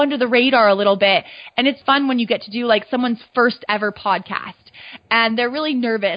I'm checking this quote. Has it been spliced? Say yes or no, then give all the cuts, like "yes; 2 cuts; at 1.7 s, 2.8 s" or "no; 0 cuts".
yes; 1 cut; at 1.8 s